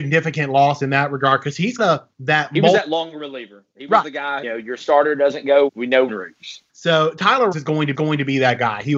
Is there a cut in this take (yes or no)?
yes